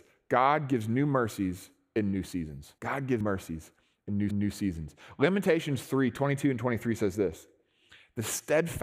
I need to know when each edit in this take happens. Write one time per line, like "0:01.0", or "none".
0:02.8
0:03.2
0:04.3